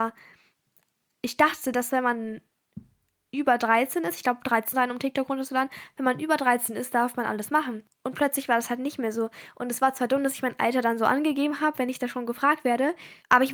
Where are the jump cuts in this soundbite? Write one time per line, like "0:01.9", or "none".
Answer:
0:04.7